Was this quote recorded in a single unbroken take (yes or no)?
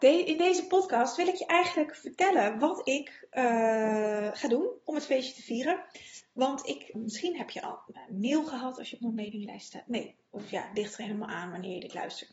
no